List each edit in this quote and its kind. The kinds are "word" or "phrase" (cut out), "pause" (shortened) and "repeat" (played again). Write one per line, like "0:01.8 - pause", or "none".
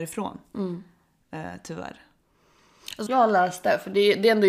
0:03.1 - phrase